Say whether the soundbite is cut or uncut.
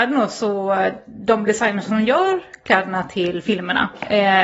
uncut